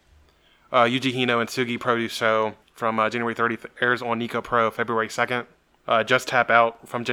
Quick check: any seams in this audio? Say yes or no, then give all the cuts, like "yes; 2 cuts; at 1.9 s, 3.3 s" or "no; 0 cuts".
yes; 2 cuts; at 2.6 s, 5.8 s